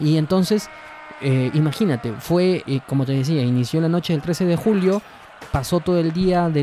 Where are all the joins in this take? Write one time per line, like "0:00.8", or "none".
0:02.6